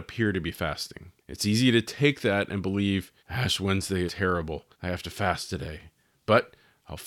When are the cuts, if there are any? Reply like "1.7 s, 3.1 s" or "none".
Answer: 1.2 s, 3.2 s, 4.1 s, 4.7 s

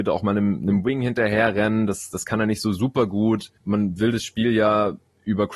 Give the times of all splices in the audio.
3.6 s

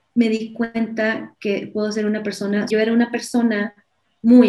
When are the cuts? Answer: 2.7 s

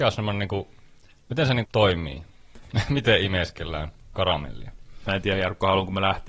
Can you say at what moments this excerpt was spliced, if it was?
1.6 s, 2.3 s

